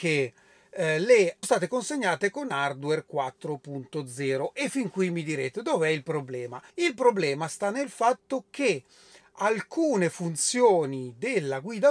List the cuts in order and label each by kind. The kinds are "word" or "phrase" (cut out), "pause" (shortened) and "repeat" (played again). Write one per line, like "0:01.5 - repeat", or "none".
0:01.4 - phrase
0:06.7 - pause